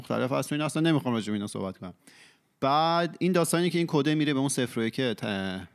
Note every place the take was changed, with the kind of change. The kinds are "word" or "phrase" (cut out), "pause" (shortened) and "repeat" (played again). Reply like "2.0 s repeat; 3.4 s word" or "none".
none